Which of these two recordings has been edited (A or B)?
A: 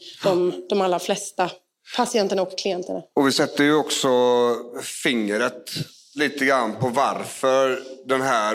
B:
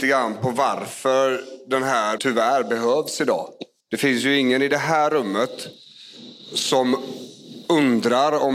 B